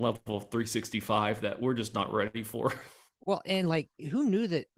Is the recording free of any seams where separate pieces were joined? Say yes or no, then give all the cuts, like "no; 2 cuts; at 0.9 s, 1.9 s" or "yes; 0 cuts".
yes; 0 cuts